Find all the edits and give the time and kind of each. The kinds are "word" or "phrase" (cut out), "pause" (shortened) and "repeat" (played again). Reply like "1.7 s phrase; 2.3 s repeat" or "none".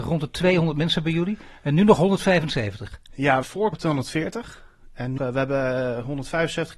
3.4 s word; 3.7 s phrase; 5.2 s word

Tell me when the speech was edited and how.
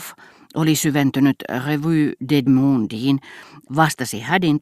2.5 s word

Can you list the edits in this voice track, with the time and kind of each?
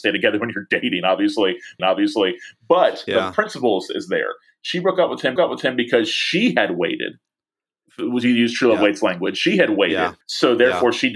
1.8 s repeat; 5.4 s repeat; 10.2 s pause

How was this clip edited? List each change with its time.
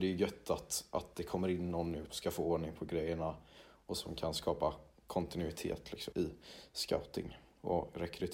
2.1 s word; 6.1 s word

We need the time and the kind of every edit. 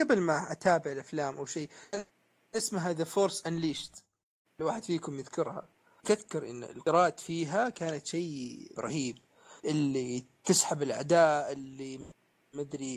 6.0 s word; 8.7 s word

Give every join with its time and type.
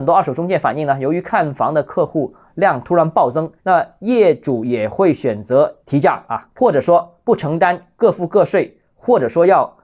3.6 s pause; 5.8 s pause

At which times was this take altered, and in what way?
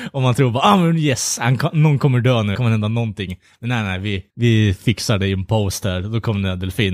2.5 s phrase; 4.3 s pause

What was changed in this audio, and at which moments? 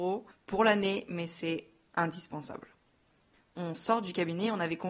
none

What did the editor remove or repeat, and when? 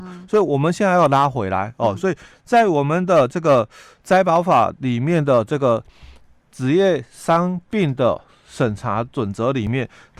none

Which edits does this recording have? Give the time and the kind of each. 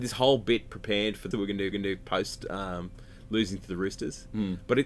1.3 s phrase; 1.7 s repeat

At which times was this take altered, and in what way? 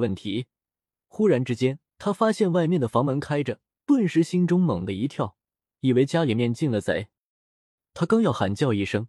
1.9 s pause; 3.7 s pause

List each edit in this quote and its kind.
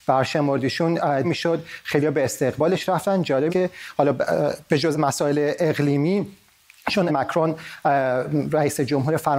1.2 s word; 3.5 s word; 4.9 s word; 7.1 s word

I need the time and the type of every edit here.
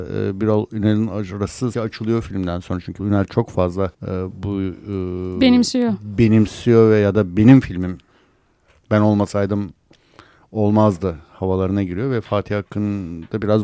1.7 s word; 3.0 s word; 3.9 s pause

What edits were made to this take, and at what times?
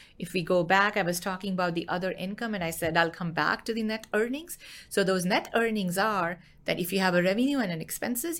none

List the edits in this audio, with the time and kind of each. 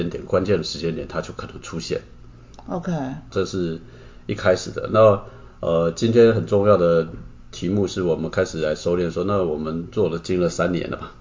3.3 s word

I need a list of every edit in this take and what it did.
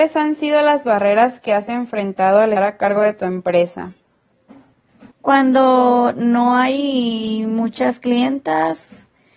2.6 s word; 5.1 s pause

